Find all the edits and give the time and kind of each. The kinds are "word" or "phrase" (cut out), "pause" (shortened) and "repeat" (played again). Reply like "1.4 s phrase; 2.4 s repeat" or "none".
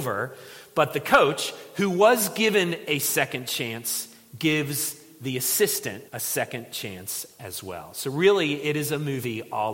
6.1 s pause